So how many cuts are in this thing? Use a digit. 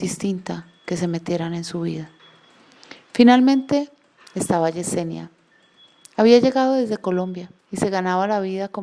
2